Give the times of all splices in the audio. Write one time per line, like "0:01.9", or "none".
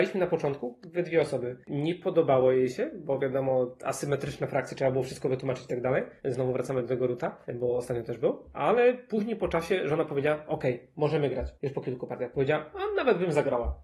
0:01.6
0:06.2
0:07.4
0:11.6